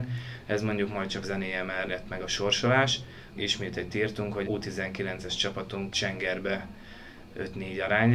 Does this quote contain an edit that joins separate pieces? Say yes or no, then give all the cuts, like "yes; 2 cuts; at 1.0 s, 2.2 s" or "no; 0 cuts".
yes; 6 cuts; at 1.2 s, 1.9 s, 3.3 s, 3.9 s, 4.4 s, 5.9 s